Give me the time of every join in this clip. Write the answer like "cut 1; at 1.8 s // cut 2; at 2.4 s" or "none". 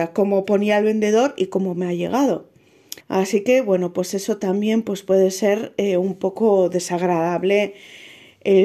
cut 1; at 3.0 s